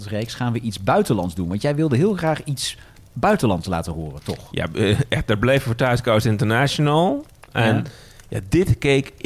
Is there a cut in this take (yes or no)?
no